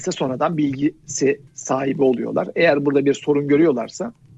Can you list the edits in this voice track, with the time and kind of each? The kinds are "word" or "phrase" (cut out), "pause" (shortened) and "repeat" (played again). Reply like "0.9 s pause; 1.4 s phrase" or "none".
1.5 s pause

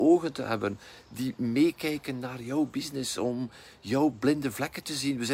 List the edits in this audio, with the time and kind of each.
none

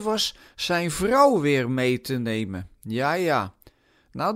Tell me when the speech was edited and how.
none

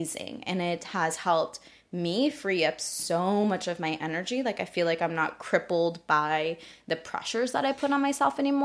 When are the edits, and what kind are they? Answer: none

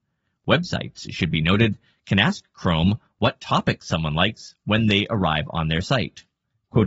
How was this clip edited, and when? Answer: none

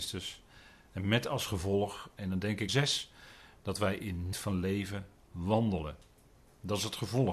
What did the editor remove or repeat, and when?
2.7 s phrase; 4.3 s word

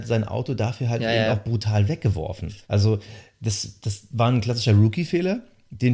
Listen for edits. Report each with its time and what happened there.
2.6 s pause

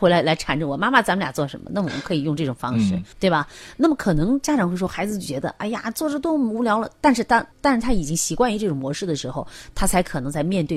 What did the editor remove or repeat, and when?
3.1 s pause; 7.5 s pause

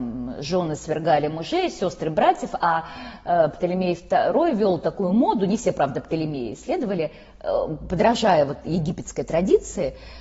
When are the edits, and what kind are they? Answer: none

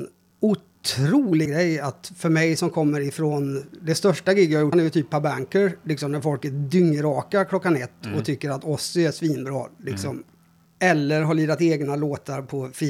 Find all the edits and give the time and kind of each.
1.5 s word; 4.7 s word

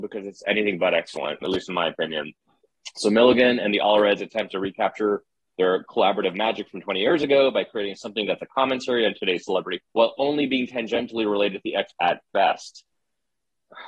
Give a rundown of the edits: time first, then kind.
1.4 s word; 9.8 s word; 11.9 s word

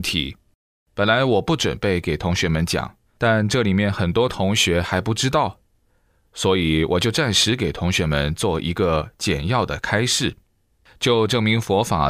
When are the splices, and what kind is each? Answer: 3.1 s pause

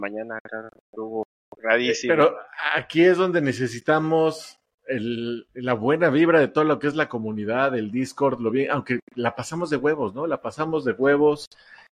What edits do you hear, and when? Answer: 9.1 s pause

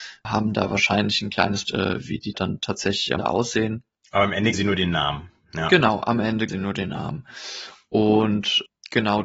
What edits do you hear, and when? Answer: 1.6 s word; 2.3 s word; 3.2 s word; 4.5 s word; 6.5 s word

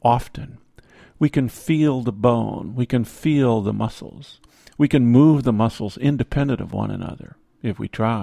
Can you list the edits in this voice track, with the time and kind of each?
none

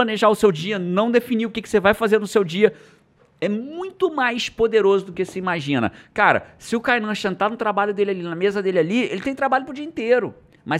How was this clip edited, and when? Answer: none

